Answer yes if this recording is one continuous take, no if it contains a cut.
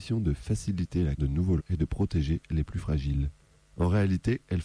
no